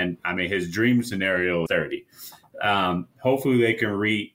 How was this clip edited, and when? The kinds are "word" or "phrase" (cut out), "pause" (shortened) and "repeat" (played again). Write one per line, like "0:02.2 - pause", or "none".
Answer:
0:01.7 - word